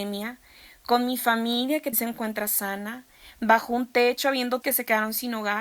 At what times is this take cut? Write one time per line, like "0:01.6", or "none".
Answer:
0:01.9
0:04.6